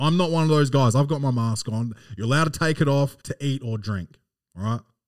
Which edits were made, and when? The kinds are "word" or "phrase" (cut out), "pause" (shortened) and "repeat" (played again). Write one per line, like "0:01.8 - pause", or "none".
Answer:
0:03.2 - pause